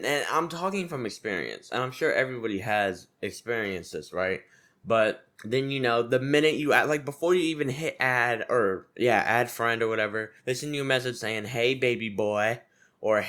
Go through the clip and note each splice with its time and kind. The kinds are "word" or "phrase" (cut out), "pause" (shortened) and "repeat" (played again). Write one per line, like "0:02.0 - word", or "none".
0:05.3 - pause
0:10.4 - pause